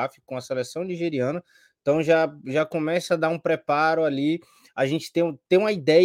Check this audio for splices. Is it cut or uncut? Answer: uncut